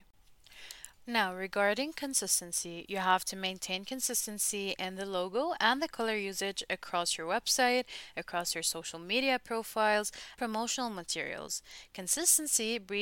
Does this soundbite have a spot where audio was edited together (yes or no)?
yes